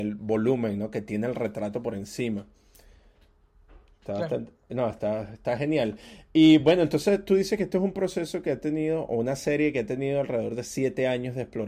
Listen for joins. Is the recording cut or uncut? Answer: uncut